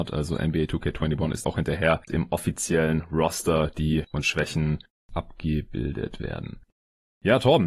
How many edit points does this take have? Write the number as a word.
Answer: three